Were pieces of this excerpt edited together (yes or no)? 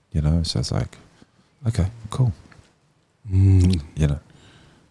no